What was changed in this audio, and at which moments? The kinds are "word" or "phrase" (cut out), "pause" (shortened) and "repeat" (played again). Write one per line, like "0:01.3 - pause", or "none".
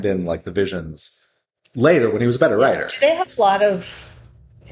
none